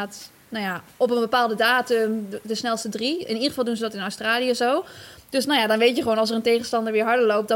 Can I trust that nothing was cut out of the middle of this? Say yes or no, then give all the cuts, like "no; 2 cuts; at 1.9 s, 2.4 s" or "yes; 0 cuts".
yes; 0 cuts